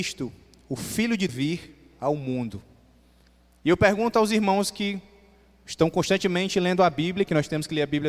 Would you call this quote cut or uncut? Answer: cut